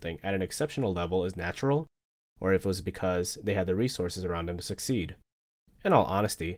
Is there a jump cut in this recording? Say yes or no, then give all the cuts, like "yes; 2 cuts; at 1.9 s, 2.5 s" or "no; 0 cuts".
no; 0 cuts